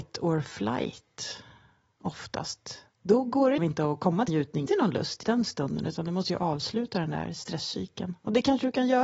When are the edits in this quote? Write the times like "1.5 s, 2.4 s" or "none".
3.6 s, 4.3 s, 4.7 s, 5.2 s